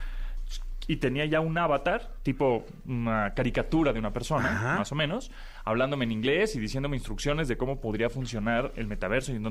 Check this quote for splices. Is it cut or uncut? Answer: uncut